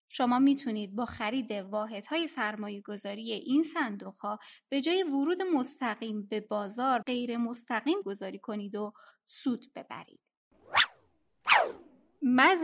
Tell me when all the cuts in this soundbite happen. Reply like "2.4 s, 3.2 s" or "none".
7.0 s, 8.0 s